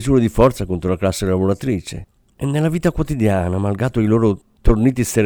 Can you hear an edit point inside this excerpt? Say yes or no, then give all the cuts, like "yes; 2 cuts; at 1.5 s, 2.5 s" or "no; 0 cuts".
no; 0 cuts